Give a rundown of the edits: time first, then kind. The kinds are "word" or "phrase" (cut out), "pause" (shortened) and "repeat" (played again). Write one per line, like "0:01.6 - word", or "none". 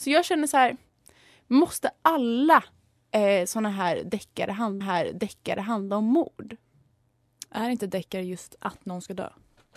0:04.8 - repeat

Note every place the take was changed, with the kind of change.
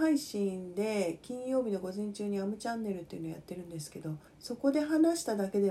0:04.3 - pause

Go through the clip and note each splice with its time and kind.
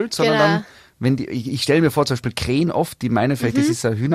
none

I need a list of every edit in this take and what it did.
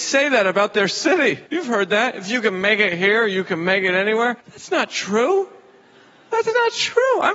0:01.5 - pause
0:04.4 - pause

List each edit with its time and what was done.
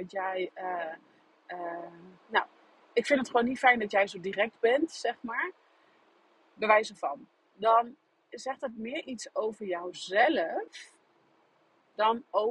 0:02.2 - pause

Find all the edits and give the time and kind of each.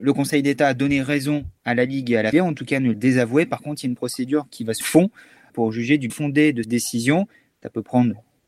0:01.6 - pause
0:02.3 - word
0:02.9 - phrase
0:04.8 - phrase
0:05.5 - word
0:06.1 - word
0:06.6 - word

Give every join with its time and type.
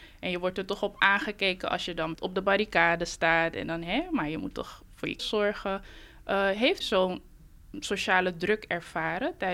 0:02.1 - word
0:05.2 - word
0:06.8 - word

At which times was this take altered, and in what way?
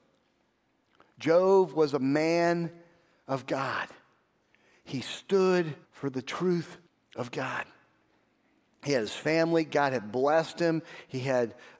0:05.8 - pause
0:06.9 - pause

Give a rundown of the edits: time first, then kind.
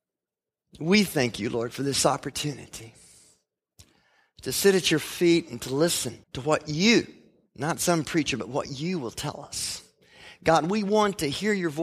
0:06.2 - pause

